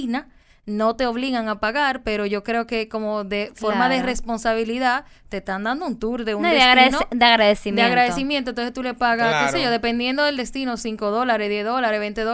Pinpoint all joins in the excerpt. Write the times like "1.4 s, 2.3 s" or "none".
none